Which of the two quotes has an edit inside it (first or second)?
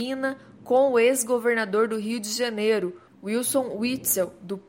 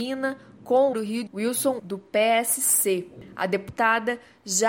second